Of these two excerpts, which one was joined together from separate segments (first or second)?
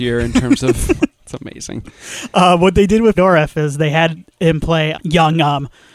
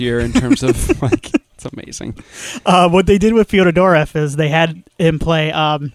first